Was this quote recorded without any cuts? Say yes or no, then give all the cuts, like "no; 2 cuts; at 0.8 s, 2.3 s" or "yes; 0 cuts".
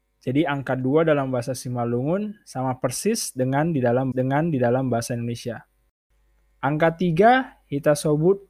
no; 1 cut; at 4.1 s